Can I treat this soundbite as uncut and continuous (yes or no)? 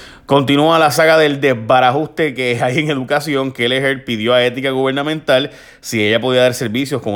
yes